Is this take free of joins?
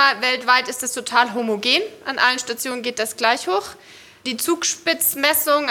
yes; 0 cuts

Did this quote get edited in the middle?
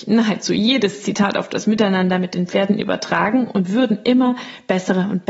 no; 0 cuts

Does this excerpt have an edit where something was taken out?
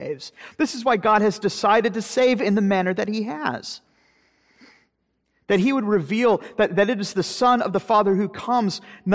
no; 0 cuts

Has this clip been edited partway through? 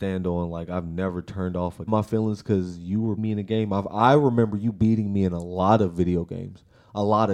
yes; 2 cuts; at 1.9 s, 3.2 s

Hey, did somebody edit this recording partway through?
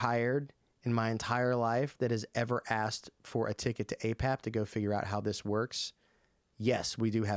no; 0 cuts

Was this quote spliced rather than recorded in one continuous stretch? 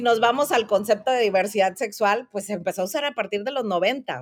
no; 0 cuts

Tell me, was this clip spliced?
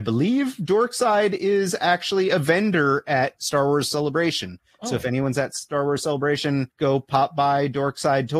yes; 1 cut; at 6.7 s

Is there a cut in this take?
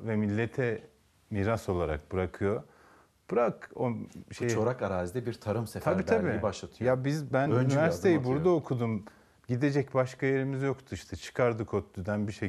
no; 0 cuts

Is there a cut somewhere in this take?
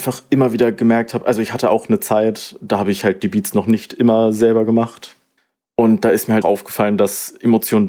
yes; 2 cuts; at 5.4 s, 6.4 s

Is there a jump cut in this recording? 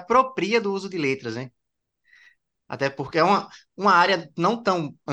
no; 0 cuts

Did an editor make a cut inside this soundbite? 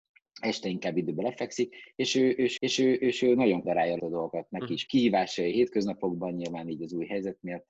yes; 4 cuts; at 2.6 s, 3.6 s, 4.0 s, 4.9 s

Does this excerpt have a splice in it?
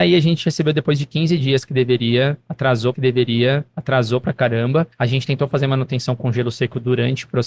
yes; 2 cuts; at 2.9 s, 4.9 s

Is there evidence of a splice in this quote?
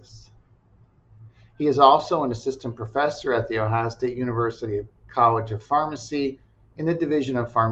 no; 0 cuts

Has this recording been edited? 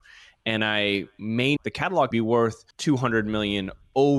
yes; 3 cuts; at 1.6 s, 2.1 s, 2.7 s

